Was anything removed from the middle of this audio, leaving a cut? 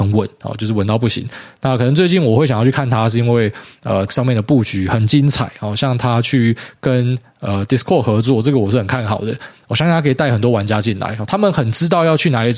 yes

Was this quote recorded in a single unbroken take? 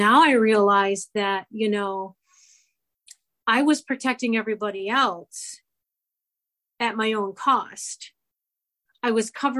yes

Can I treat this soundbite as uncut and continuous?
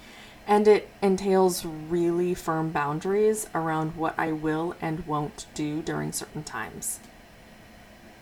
yes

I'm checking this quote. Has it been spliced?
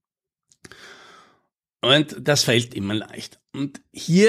yes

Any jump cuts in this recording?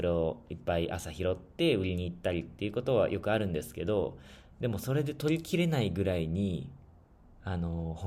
no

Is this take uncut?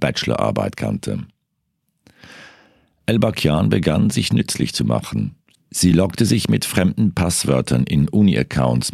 yes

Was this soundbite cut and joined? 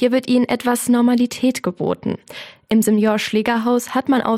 no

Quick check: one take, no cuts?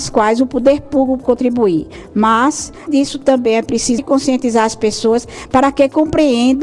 no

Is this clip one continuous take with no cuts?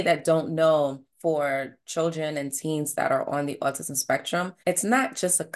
no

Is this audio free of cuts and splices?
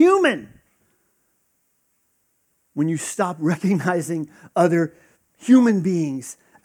yes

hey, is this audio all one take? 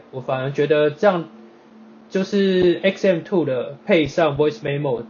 yes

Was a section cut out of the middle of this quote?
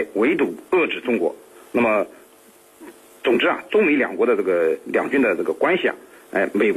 no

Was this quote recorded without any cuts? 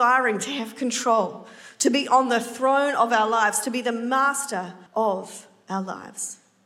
no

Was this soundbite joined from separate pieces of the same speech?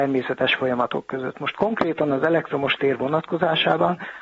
no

